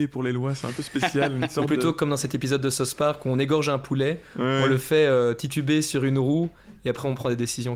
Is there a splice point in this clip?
no; 0 cuts

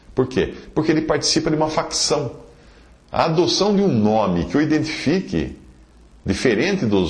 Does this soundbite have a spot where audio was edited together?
no; 0 cuts

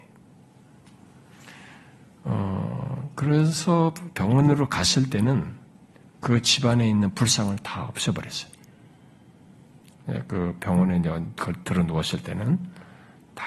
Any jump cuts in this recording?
no; 0 cuts

